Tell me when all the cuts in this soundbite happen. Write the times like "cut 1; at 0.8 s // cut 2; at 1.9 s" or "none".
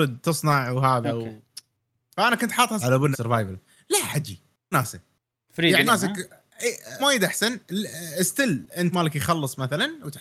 cut 1; at 2.8 s // cut 2; at 3.1 s // cut 3; at 4.7 s // cut 4; at 5.9 s // cut 5; at 7.0 s // cut 6; at 8.9 s